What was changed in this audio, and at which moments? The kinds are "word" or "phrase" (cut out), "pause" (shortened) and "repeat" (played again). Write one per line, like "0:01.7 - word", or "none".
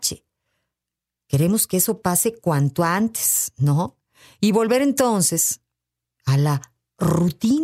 none